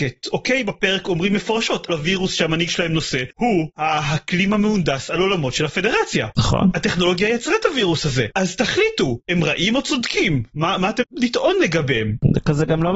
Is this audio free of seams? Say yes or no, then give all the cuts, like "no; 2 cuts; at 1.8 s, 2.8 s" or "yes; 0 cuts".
no; 2 cuts; at 1.9 s, 11.0 s